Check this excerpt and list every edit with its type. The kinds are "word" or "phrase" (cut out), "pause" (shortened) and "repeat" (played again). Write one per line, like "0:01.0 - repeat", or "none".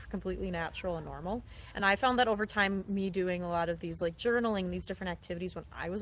none